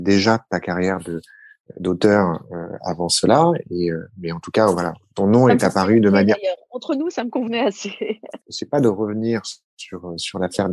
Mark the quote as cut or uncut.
cut